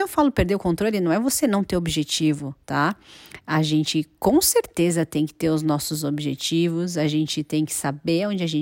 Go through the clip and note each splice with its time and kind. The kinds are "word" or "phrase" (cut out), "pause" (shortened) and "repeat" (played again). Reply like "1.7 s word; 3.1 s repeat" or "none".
2.6 s pause

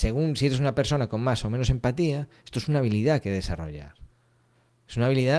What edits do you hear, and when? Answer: none

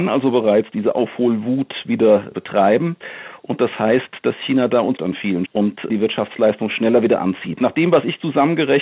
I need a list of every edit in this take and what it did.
2.3 s word; 5.0 s word; 5.5 s word; 5.9 s word

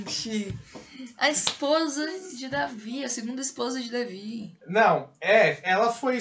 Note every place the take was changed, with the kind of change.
4.6 s pause

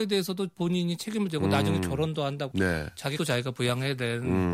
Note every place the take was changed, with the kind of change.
2.5 s word; 3.2 s word

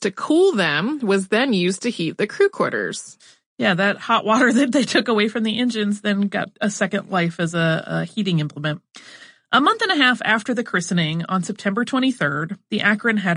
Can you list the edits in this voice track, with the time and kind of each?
none

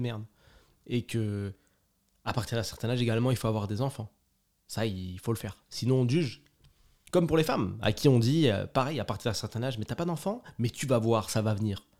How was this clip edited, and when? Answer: none

